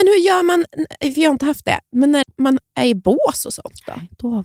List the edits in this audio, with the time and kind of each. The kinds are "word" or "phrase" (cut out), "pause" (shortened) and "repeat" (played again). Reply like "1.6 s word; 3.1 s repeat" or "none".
2.2 s word